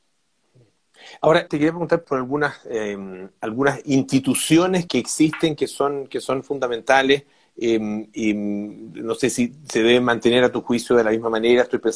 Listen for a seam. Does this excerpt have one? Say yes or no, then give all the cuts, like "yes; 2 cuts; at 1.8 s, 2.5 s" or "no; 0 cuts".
yes; 3 cuts; at 1.5 s, 2.0 s, 4.9 s